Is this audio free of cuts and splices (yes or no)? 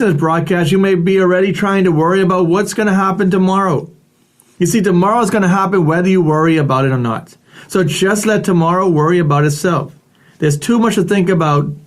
yes